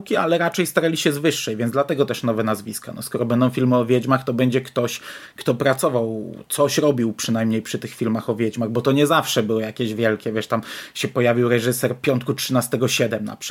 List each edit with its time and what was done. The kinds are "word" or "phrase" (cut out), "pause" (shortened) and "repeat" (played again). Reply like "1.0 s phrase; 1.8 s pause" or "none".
none